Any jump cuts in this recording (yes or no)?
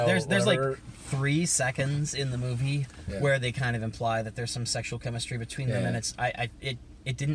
no